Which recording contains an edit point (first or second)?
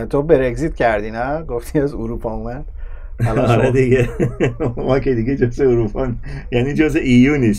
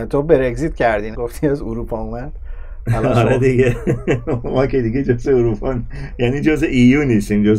second